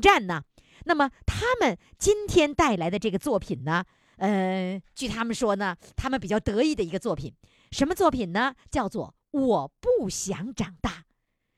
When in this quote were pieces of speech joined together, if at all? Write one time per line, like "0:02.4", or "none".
none